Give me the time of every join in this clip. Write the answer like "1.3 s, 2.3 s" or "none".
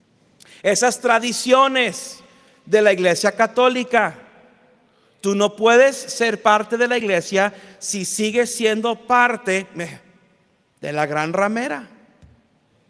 none